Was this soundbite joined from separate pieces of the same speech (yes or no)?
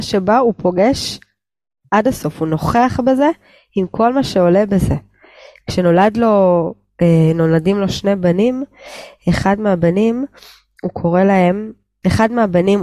no